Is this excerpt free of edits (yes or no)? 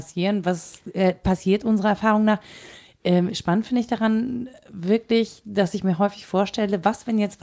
yes